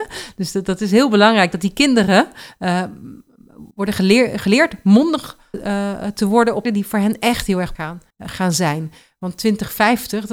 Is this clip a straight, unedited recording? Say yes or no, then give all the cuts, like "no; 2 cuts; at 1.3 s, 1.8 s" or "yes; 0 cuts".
no; 5 cuts; at 3.7 s, 5.5 s, 6.6 s, 7.7 s, 8.1 s